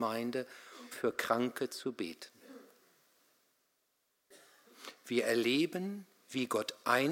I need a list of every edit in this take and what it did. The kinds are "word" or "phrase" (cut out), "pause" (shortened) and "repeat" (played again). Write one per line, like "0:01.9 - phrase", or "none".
0:00.9 - word